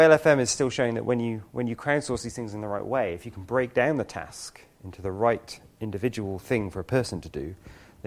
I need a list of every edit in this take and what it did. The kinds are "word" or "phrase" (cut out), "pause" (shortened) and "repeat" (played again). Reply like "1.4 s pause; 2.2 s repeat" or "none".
none